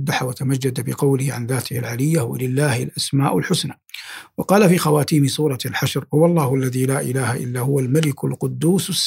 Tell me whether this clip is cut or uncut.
uncut